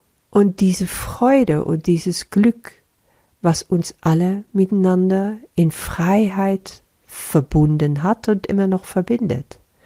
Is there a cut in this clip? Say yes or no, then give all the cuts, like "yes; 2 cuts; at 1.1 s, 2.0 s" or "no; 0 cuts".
no; 0 cuts